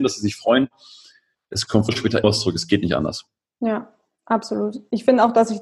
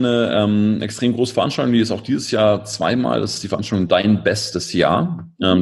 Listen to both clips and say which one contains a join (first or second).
first